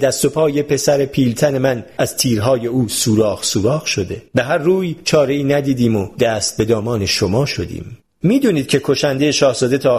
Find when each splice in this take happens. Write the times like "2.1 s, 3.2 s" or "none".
4.3 s, 8.0 s